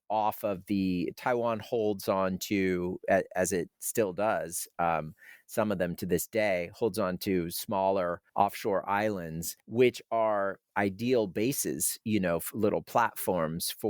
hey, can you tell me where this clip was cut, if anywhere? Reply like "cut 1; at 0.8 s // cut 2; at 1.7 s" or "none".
cut 1; at 8.3 s // cut 2; at 9.6 s

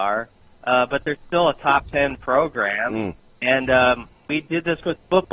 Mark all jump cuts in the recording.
none

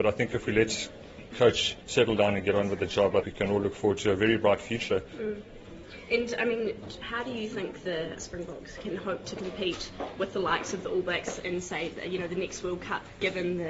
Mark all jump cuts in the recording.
cut 1; at 1.3 s // cut 2; at 1.8 s // cut 3; at 3.2 s // cut 4; at 7.0 s // cut 5; at 8.2 s

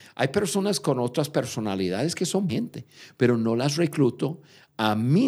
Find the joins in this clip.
cut 1; at 2.5 s

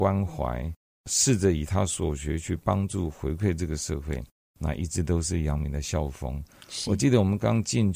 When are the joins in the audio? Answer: none

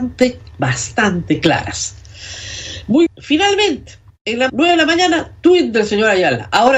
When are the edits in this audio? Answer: cut 1; at 3.1 s // cut 2; at 4.1 s // cut 3; at 4.5 s

